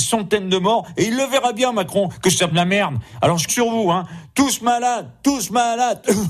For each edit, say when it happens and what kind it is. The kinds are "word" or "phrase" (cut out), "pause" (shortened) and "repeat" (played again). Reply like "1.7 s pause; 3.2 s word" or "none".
2.5 s phrase; 3.5 s word